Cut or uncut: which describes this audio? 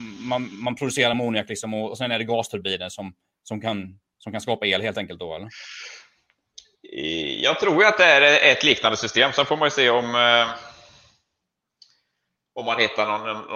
uncut